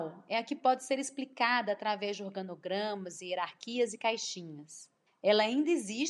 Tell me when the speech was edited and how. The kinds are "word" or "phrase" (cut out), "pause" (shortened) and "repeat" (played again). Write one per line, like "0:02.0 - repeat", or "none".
0:05.1 - pause